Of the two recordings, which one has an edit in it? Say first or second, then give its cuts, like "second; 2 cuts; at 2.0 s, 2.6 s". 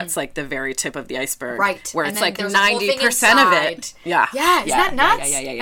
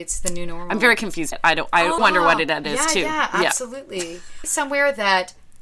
second; 4 cuts; at 1.3 s, 2.0 s, 2.6 s, 4.4 s